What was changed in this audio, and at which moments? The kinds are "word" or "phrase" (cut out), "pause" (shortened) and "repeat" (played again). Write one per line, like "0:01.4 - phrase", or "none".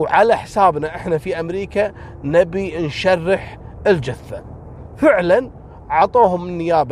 none

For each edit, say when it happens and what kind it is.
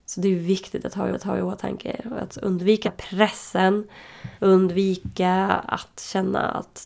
0:01.1 - repeat
0:02.8 - word
0:04.3 - pause

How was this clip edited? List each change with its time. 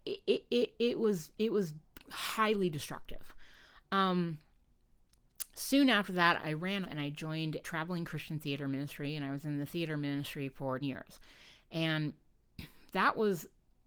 0:06.4 - word
0:06.8 - word
0:07.6 - word
0:10.8 - word

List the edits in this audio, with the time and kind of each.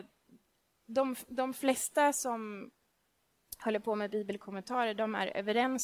none

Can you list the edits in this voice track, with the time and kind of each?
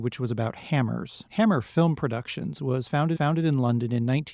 0:01.3 - pause
0:03.1 - repeat

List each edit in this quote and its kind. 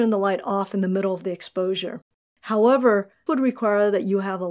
0:03.3 - word

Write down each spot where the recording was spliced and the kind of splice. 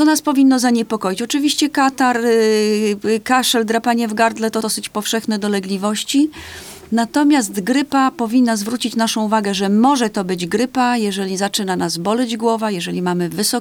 0:04.6 - word

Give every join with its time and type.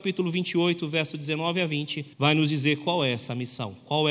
0:02.1 - pause

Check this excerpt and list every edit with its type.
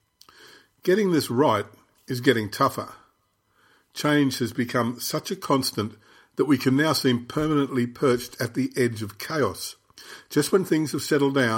none

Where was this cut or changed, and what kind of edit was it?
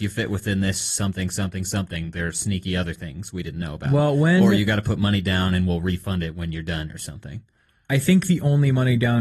none

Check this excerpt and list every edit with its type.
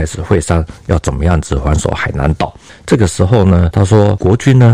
none

